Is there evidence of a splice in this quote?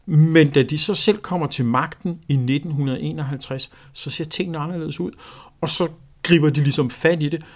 no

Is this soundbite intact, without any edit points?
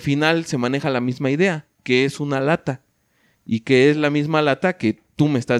yes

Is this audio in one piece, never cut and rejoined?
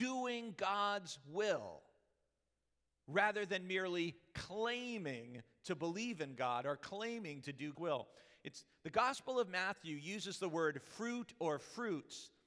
no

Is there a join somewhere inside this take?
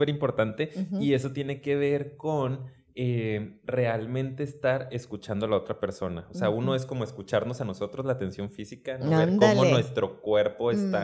no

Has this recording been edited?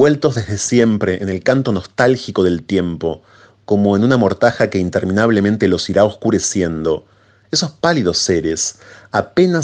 no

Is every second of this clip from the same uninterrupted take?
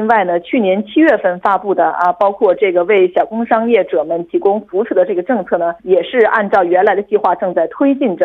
no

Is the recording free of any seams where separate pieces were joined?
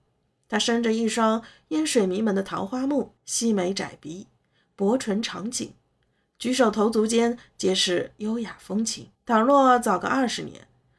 no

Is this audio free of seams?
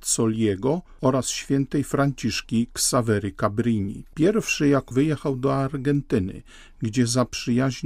no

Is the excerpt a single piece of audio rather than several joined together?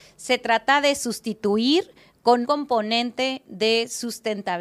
no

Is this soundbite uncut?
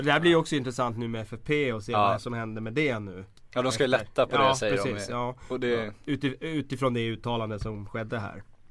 yes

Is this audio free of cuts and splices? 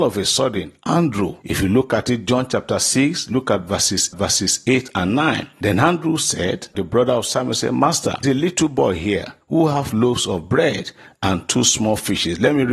no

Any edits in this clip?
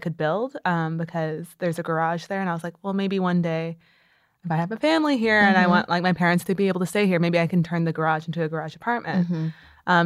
no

